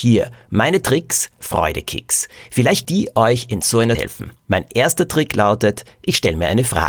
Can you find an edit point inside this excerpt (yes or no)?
yes